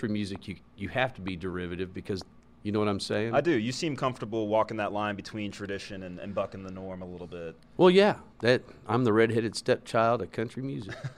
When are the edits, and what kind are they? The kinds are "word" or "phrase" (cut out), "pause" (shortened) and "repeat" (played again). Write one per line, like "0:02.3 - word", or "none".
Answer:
0:02.5 - phrase
0:08.3 - pause